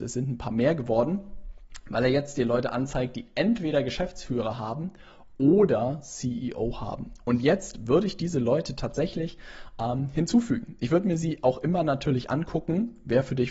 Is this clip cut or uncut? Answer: uncut